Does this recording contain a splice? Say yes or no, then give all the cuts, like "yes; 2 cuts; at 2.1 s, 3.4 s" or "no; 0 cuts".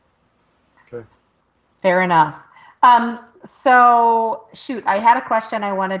no; 0 cuts